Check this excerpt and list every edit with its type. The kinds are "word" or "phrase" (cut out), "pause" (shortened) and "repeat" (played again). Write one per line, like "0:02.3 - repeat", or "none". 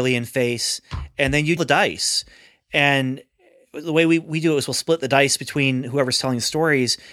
0:01.6 - phrase